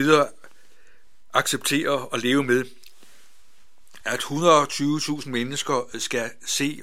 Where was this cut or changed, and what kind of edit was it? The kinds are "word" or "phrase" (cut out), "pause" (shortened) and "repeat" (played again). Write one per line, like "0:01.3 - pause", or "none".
none